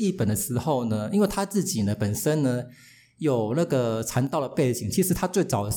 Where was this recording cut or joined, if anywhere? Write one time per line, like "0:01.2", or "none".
none